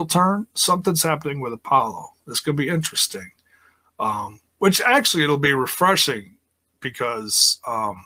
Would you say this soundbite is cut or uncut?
uncut